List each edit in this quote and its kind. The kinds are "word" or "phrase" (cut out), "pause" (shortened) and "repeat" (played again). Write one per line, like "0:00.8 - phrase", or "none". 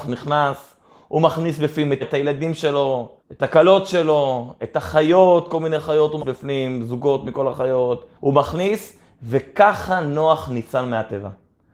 0:02.0 - word
0:03.2 - pause
0:06.2 - word
0:08.2 - pause